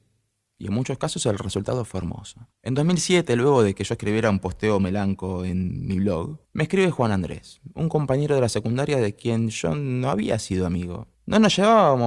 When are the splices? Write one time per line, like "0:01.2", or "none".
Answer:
0:02.5
0:06.4
0:11.1